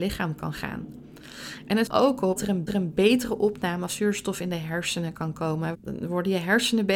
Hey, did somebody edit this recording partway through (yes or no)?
yes